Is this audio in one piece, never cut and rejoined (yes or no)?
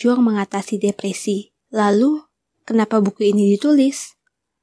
no